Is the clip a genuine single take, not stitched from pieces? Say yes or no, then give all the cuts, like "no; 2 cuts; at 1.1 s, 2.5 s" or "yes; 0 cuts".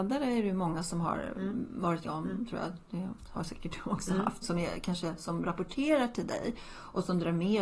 no; 2 cuts; at 2.0 s, 4.4 s